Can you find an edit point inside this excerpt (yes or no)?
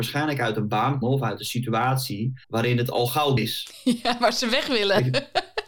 yes